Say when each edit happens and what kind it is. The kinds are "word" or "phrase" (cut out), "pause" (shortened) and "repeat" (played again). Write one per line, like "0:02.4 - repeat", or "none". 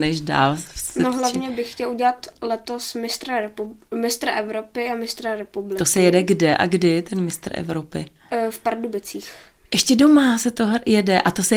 none

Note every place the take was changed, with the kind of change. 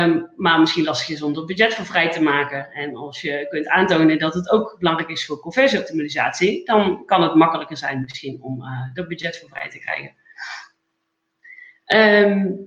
none

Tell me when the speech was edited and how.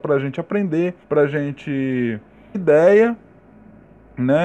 0:01.0 - pause
0:02.5 - word

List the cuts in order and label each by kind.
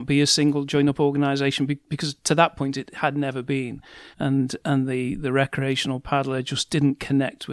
0:04.1 - pause

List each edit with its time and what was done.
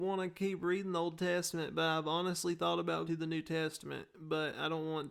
0:03.1 - word

